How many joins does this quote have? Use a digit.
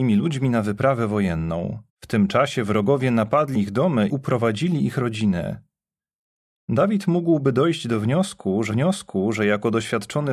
4